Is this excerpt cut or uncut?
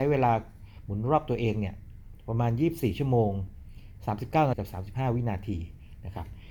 cut